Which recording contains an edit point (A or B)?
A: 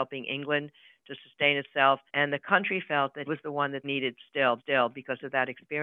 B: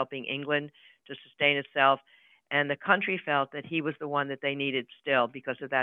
A